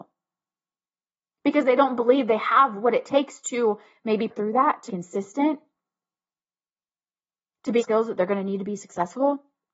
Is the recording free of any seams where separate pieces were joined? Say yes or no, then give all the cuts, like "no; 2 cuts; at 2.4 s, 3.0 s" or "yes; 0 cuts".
no; 3 cuts; at 4.3 s, 4.9 s, 7.8 s